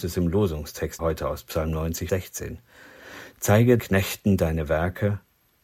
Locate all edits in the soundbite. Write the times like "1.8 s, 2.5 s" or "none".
1.0 s, 2.1 s, 3.8 s